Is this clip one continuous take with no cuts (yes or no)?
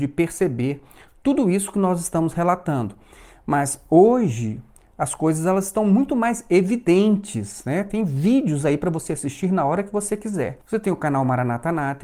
no